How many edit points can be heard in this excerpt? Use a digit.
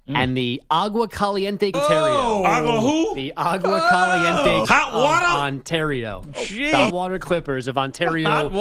3